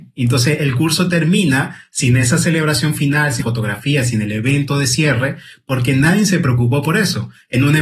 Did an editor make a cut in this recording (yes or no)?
yes